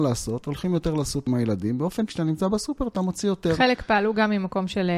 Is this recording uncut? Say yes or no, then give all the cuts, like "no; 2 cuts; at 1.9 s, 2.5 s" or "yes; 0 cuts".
no; 2 cuts; at 1.3 s, 2.1 s